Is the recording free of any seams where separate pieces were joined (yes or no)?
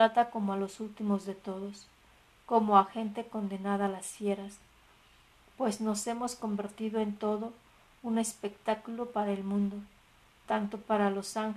yes